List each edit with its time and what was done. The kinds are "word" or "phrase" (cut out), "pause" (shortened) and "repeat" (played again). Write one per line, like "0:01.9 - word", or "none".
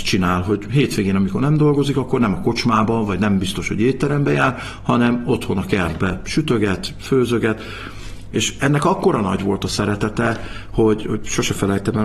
0:11.0 - word